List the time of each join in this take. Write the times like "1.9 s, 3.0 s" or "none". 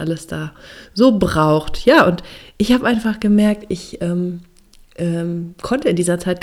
none